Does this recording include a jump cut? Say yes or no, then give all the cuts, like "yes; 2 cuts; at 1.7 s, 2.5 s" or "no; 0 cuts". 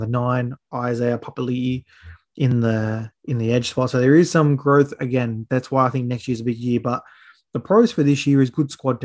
no; 0 cuts